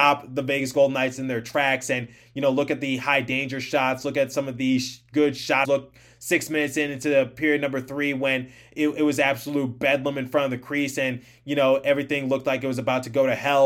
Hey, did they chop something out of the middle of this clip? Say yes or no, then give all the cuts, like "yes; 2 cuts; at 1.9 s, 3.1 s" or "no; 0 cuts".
yes; 1 cut; at 5.6 s